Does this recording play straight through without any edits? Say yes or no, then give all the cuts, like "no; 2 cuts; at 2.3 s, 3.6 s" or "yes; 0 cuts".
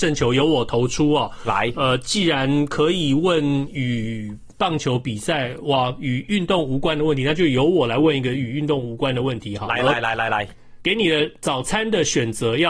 yes; 0 cuts